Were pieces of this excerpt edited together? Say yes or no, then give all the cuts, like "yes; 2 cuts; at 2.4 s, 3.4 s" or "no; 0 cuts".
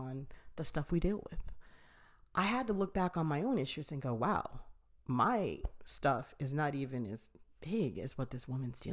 no; 0 cuts